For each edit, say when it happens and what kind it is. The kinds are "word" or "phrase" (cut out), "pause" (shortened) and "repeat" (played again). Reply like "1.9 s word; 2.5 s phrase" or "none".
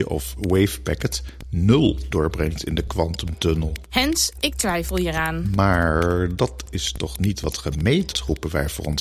2.1 s word; 8.1 s word